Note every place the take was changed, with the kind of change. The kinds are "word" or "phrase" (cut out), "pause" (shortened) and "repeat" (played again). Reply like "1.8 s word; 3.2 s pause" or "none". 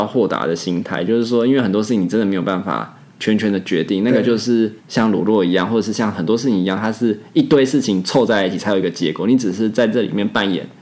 4.8 s pause